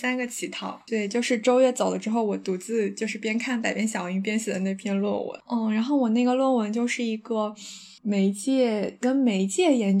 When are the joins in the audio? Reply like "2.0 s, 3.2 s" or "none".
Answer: 8.0 s